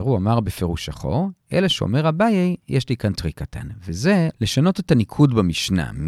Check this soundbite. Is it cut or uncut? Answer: uncut